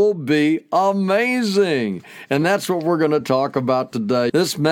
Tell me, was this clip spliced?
no; 0 cuts

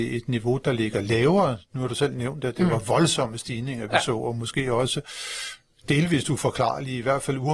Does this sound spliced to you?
no; 0 cuts

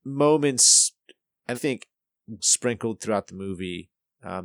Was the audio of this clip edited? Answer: yes; 2 cuts; at 1.5 s, 2.4 s

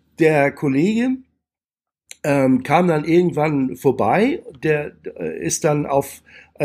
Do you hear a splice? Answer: no; 0 cuts

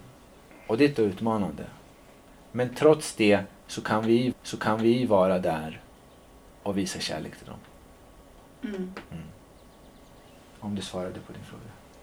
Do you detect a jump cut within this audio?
yes; 3 cuts; at 0.9 s, 4.3 s, 6.5 s

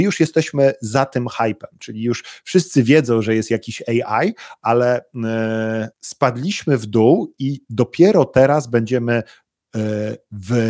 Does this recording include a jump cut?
yes; 1 cut; at 5.9 s

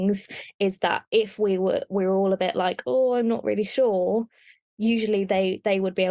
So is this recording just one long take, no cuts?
yes; 0 cuts

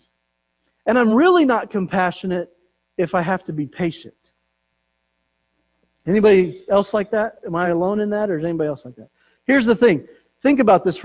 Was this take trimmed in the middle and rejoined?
no; 0 cuts

